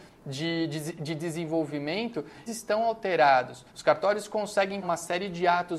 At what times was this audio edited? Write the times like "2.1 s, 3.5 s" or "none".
2.5 s, 3.7 s, 4.8 s